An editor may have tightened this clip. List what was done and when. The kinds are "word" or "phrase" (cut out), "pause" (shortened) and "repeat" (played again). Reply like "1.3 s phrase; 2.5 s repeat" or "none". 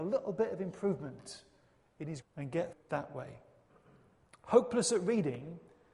2.2 s word; 2.7 s word